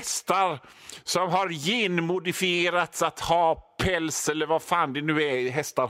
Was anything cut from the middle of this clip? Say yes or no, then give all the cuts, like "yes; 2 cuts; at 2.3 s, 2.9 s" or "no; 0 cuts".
no; 0 cuts